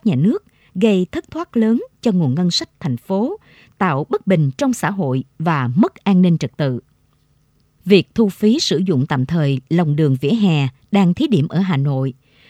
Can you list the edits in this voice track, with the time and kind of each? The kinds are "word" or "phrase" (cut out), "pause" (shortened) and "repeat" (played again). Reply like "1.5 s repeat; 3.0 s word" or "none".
none